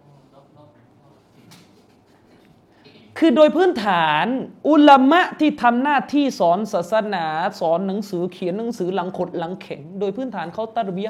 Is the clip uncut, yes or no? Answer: no